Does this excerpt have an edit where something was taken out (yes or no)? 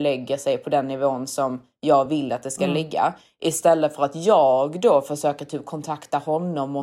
no